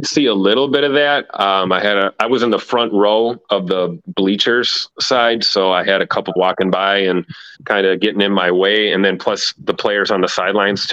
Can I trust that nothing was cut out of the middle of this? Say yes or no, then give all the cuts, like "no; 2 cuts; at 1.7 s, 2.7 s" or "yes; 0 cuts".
no; 2 cuts; at 6.4 s, 7.5 s